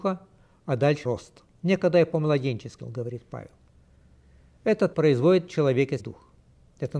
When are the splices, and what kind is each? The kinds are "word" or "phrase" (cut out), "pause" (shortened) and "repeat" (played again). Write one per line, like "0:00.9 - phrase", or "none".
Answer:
0:01.0 - word
0:01.5 - pause
0:02.8 - word
0:04.9 - word
0:06.0 - word